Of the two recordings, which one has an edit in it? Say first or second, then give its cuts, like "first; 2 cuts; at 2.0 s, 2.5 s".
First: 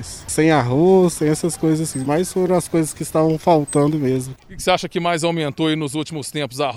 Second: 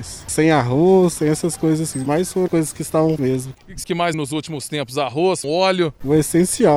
second; 5 cuts; at 2.5 s, 3.2 s, 3.8 s, 4.1 s, 5.4 s